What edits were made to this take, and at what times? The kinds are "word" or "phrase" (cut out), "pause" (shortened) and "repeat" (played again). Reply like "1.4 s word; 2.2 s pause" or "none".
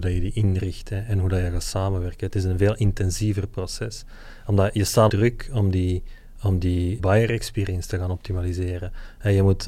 5.1 s word; 7.0 s word